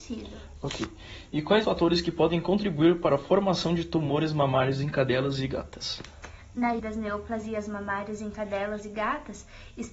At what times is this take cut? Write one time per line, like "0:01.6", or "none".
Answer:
0:01.6
0:06.8